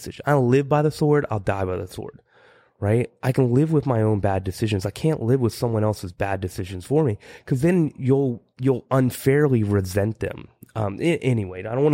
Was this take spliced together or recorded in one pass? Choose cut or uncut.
uncut